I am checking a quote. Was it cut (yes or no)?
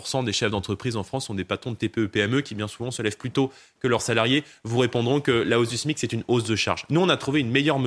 no